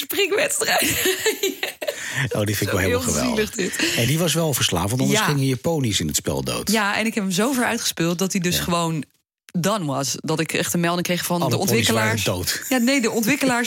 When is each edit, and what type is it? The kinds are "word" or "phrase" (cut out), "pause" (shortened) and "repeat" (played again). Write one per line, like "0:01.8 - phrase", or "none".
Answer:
none